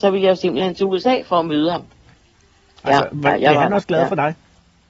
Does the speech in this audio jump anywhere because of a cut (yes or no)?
no